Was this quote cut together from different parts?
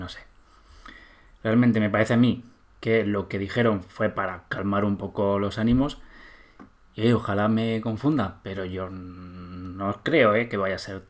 no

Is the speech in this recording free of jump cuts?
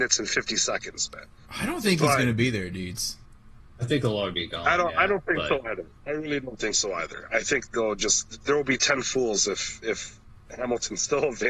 yes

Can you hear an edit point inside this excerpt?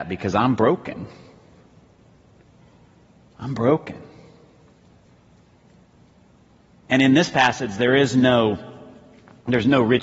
no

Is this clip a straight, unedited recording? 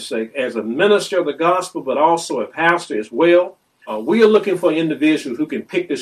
yes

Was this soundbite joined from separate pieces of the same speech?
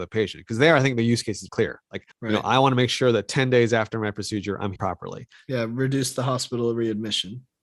yes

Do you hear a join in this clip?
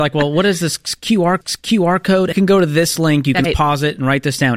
yes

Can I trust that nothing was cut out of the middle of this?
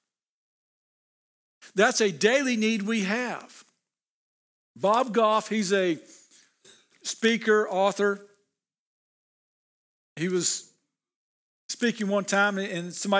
yes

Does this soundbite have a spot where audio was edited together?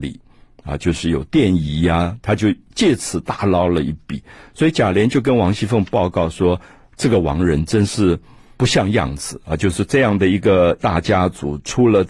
no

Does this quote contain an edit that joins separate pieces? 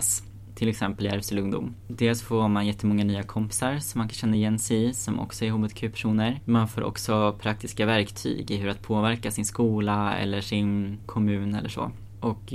no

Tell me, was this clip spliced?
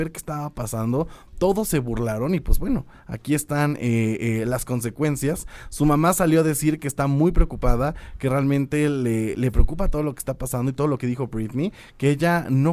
yes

